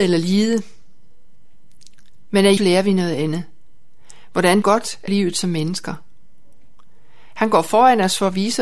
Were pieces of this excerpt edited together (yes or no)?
yes